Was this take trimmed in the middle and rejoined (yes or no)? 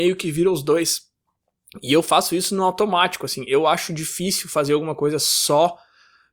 no